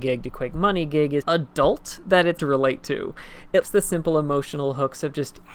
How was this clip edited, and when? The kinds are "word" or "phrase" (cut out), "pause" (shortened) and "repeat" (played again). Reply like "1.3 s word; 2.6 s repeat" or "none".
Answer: 1.2 s word; 2.4 s word; 3.6 s word